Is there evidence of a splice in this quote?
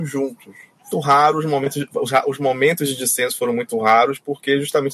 yes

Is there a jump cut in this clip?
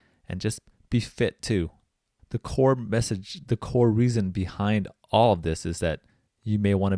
no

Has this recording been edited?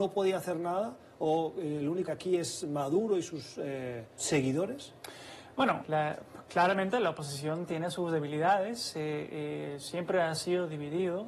yes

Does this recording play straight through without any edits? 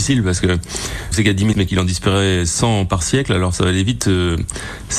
no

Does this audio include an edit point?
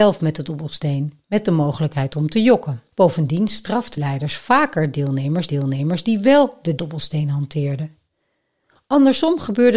yes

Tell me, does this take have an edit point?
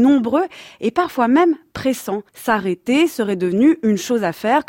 yes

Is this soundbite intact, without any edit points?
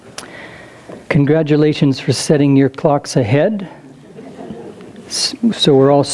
no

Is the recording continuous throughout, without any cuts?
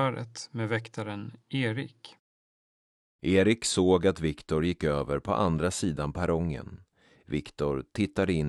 yes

